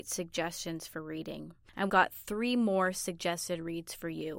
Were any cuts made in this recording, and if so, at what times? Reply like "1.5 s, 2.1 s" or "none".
1.9 s